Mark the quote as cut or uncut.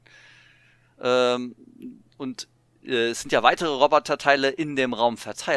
uncut